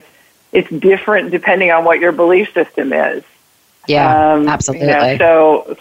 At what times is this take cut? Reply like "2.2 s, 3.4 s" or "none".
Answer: none